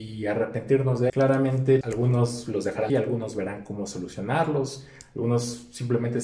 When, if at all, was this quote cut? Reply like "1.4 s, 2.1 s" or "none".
1.1 s, 1.8 s, 2.9 s